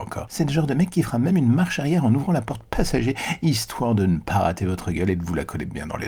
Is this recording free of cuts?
yes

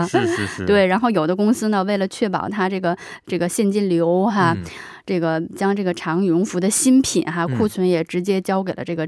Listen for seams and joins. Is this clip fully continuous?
yes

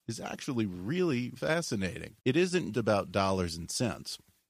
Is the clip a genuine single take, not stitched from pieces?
no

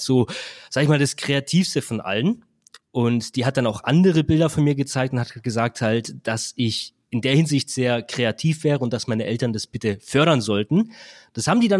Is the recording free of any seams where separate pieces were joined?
yes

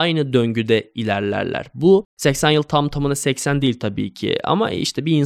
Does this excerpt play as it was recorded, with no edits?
yes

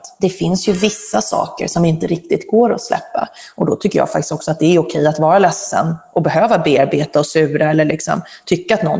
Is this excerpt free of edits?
yes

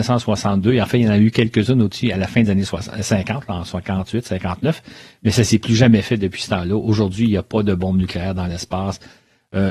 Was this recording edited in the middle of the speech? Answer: no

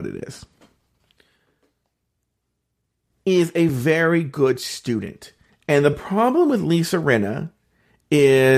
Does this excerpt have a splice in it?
no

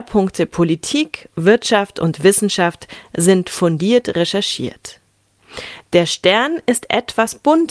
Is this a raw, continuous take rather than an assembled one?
yes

